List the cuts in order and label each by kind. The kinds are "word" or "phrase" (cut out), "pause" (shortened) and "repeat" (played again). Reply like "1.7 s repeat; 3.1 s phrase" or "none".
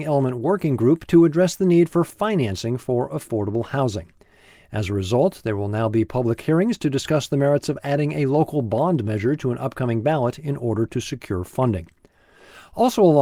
none